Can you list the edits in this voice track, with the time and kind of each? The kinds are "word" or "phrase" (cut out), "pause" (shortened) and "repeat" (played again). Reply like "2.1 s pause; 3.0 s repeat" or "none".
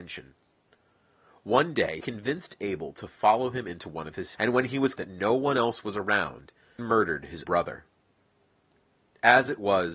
2.0 s word; 4.3 s word; 5.0 s word; 6.8 s word; 7.4 s word